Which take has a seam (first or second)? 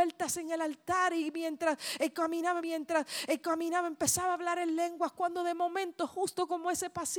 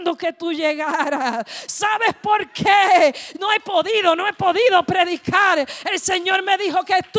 first